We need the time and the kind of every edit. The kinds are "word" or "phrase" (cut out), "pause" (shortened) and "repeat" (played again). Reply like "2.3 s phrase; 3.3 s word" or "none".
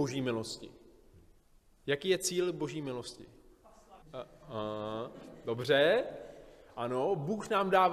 1.4 s pause; 4.0 s pause